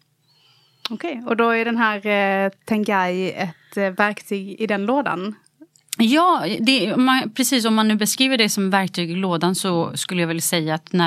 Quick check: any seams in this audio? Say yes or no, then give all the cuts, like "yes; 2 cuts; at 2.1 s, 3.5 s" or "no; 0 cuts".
no; 0 cuts